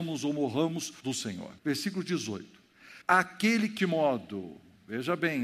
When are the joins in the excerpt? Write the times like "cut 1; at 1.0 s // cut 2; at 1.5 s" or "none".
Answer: cut 1; at 1.0 s // cut 2; at 1.6 s // cut 3; at 3.0 s // cut 4; at 3.8 s